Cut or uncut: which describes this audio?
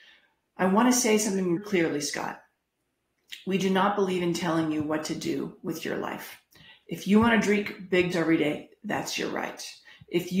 cut